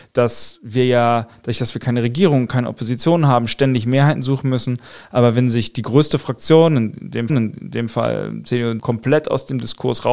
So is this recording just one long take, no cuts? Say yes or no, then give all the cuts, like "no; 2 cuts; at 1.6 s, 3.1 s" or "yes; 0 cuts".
no; 2 cuts; at 7.3 s, 8.8 s